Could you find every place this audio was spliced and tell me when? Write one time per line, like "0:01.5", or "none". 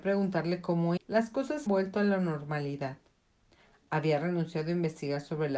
0:01.0
0:01.7